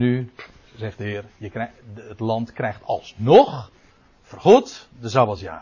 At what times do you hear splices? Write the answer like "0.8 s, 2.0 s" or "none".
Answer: none